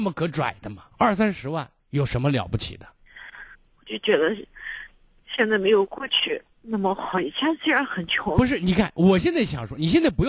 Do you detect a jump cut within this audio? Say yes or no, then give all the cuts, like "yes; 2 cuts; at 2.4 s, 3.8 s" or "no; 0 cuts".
yes; 4 cuts; at 0.9 s, 1.8 s, 3.5 s, 6.5 s